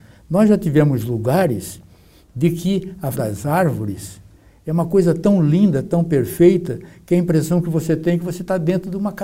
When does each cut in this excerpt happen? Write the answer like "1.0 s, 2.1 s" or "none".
3.1 s